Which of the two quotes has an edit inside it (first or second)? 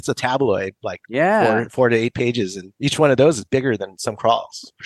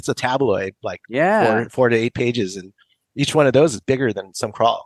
first